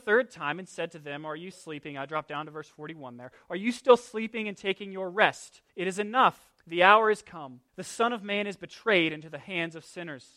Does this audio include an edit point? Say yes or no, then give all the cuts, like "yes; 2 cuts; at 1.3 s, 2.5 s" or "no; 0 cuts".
yes; 4 cuts; at 1.5 s, 5.7 s, 6.6 s, 7.7 s